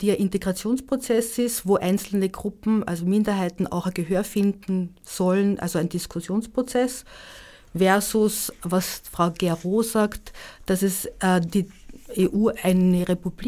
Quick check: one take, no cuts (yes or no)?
yes